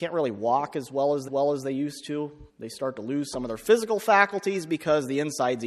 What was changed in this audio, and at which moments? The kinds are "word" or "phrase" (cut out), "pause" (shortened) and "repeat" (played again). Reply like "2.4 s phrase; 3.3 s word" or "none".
1.3 s repeat; 2.5 s pause